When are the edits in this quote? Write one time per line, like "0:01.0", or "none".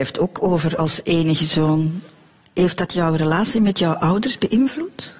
none